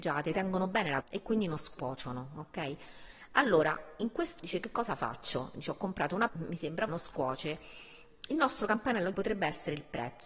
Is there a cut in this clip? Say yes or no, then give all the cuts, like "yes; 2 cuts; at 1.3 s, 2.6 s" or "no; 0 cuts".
yes; 5 cuts; at 1.0 s, 4.4 s, 6.3 s, 6.9 s, 9.1 s